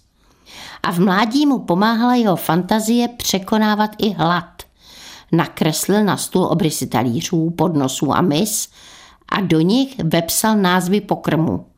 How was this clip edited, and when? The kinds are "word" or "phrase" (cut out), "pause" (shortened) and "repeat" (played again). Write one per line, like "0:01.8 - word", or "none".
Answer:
none